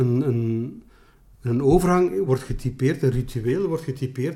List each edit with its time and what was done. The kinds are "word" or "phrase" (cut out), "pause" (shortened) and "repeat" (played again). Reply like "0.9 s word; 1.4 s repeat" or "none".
none